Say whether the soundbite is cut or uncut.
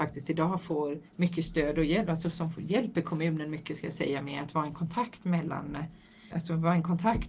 cut